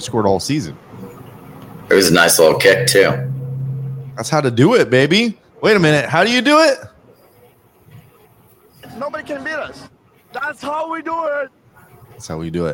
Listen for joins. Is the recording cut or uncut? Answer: uncut